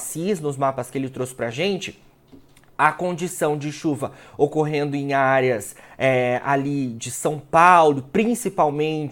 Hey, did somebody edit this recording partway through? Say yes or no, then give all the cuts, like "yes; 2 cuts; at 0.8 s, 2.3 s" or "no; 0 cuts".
no; 0 cuts